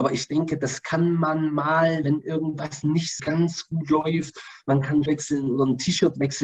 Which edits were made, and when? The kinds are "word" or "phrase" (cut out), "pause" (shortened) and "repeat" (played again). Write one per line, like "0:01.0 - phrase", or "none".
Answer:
0:02.0 - word
0:03.2 - word
0:05.1 - word